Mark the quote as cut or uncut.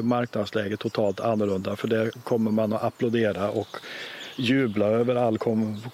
uncut